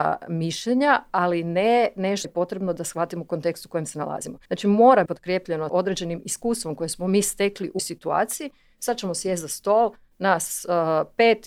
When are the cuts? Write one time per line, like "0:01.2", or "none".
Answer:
0:02.2
0:04.4
0:05.1
0:05.7
0:07.8